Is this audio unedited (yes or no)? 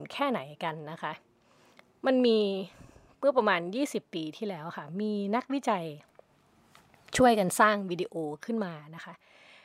yes